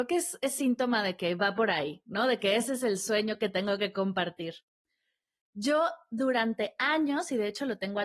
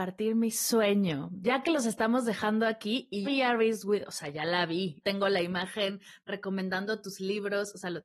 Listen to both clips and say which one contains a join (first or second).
second